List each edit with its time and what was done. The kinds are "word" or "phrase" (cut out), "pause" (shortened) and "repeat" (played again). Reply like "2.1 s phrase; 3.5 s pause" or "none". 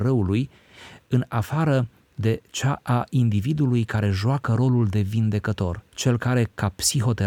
5.9 s pause